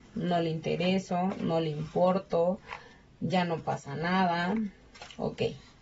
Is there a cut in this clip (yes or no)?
no